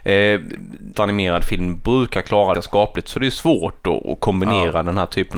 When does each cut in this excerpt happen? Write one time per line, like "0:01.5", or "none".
0:00.9
0:02.5